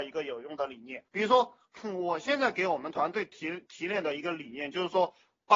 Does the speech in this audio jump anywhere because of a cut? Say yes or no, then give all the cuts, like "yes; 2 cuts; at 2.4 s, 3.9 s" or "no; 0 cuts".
yes; 1 cut; at 1.1 s